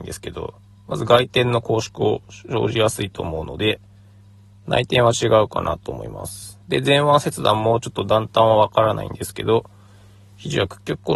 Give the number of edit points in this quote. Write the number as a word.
one